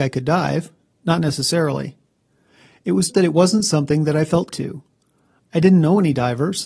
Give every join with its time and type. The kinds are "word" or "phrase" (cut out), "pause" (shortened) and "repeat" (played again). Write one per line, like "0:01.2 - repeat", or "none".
0:03.1 - word
0:04.5 - word